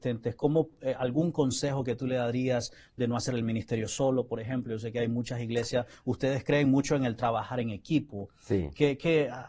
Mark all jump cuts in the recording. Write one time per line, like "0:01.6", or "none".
none

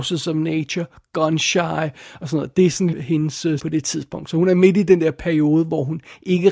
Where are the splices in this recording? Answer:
0:02.9
0:03.6

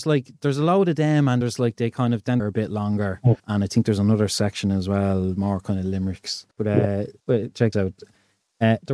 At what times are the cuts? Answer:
0:01.4
0:02.4
0:03.4
0:06.5
0:07.2
0:07.7

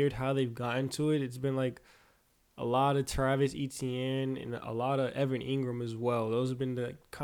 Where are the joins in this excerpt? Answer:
none

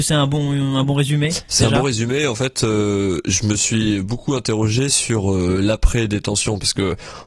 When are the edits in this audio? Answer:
none

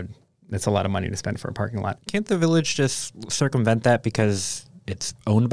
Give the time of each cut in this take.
none

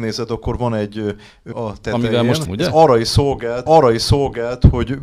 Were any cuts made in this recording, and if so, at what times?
0:01.5
0:02.5
0:03.7

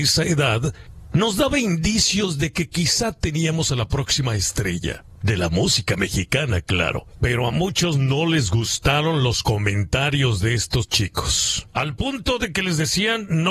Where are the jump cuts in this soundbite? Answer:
none

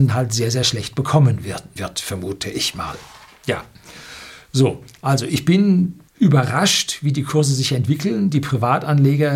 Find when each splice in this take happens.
0:01.8
0:06.1

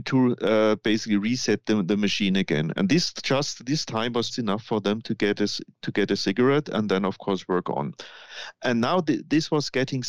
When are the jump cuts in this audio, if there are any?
0:04.3

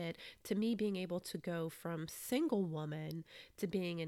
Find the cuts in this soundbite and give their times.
none

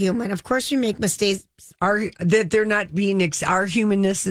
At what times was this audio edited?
0:01.7

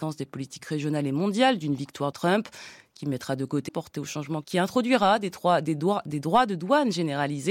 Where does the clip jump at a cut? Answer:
0:02.1
0:03.7
0:04.4

